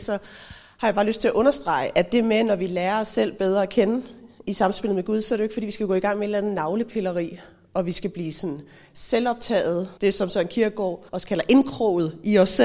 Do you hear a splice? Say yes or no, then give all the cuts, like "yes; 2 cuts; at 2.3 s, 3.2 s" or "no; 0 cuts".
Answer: yes; 2 cuts; at 10.0 s, 11.1 s